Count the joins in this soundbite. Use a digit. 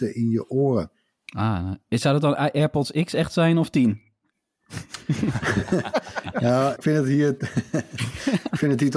1